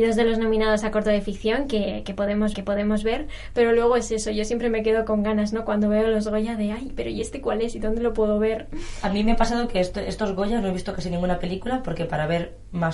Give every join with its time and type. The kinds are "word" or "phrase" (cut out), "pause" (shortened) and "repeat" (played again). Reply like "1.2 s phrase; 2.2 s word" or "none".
2.5 s repeat